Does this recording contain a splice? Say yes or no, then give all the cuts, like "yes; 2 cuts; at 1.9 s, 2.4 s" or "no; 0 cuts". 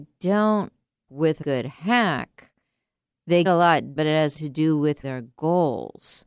yes; 6 cuts; at 1.1 s, 1.4 s, 3.4 s, 4.0 s, 4.3 s, 5.0 s